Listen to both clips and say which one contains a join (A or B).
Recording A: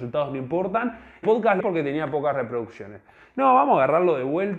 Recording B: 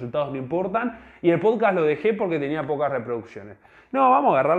A